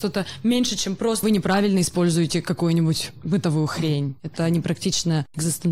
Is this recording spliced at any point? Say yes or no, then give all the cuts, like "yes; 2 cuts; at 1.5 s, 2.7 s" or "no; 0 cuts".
yes; 1 cut; at 1.2 s